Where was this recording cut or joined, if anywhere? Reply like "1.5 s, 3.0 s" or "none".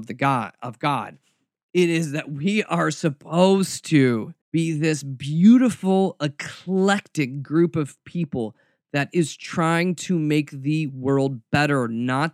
4.4 s